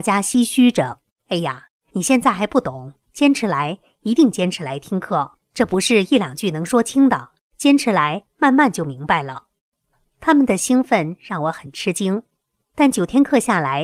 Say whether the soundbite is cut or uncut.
cut